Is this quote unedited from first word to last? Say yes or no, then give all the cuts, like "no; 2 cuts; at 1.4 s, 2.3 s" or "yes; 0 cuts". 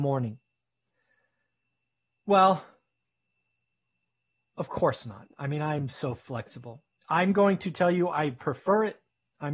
yes; 0 cuts